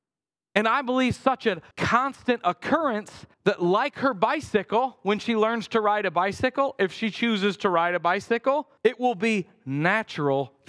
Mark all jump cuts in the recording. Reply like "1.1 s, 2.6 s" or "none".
1.7 s, 3.3 s, 8.8 s